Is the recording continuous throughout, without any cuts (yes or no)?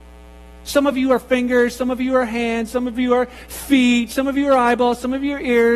yes